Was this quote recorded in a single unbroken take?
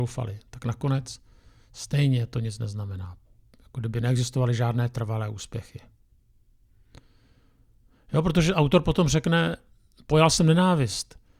yes; 0 cuts

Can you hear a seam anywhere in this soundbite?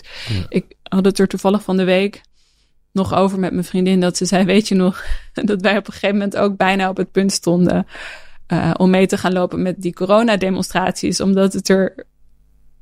no; 0 cuts

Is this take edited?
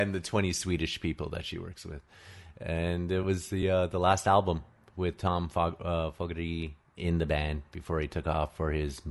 no; 0 cuts

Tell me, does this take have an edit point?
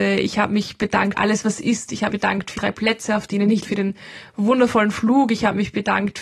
yes; 4 cuts; at 1.1 s, 2.1 s, 2.5 s, 3.6 s

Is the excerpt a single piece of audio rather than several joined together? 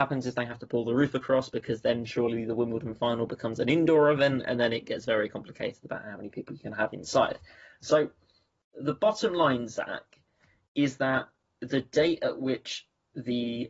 yes; 0 cuts

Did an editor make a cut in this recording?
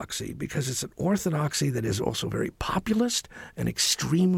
no; 0 cuts

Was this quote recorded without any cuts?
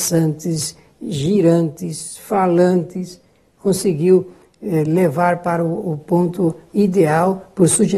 yes; 0 cuts

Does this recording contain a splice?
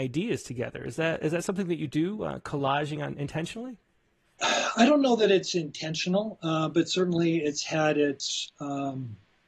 no; 0 cuts

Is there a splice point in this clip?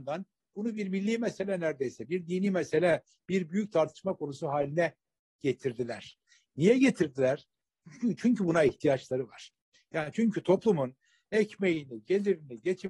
no; 0 cuts

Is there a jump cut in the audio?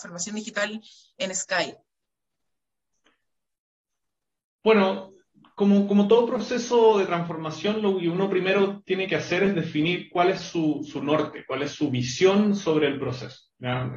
no; 0 cuts

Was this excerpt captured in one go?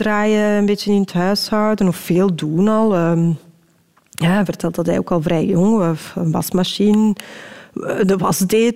yes; 0 cuts

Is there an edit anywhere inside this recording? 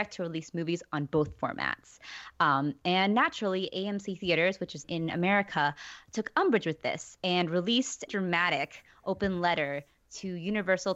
yes; 2 cuts; at 4.8 s, 8.1 s

